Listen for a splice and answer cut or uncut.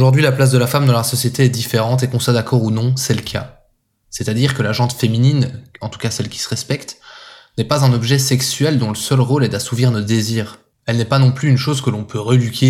uncut